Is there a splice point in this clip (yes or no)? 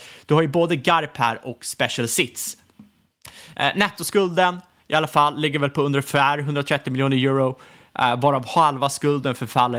no